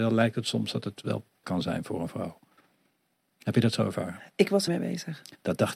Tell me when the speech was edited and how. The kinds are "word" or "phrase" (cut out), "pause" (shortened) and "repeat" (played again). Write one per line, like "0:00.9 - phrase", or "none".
0:01.4 - word
0:04.7 - word